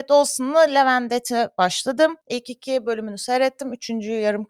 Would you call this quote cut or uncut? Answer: cut